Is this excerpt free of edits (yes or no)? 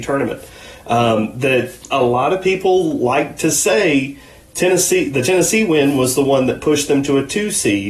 yes